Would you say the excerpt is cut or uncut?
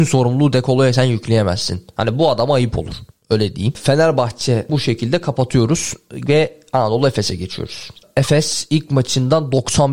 cut